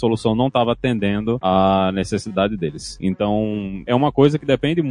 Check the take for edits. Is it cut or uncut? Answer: uncut